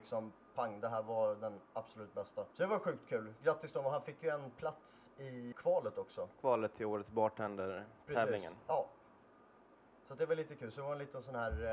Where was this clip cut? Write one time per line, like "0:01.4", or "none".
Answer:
0:02.5
0:05.5